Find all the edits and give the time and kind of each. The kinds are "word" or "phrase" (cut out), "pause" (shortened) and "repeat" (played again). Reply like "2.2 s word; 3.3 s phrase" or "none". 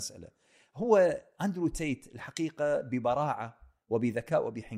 none

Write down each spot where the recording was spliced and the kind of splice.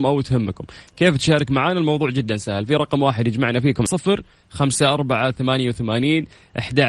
3.9 s phrase

